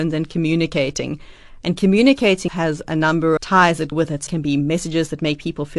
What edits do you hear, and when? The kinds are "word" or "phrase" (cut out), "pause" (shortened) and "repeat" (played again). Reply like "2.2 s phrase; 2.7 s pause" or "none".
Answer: 2.5 s word; 3.4 s phrase; 3.9 s word; 4.3 s word